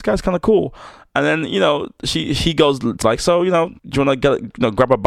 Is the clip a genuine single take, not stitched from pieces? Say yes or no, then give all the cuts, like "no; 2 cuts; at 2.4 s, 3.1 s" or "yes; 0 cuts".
no; 2 cuts; at 3.0 s, 3.8 s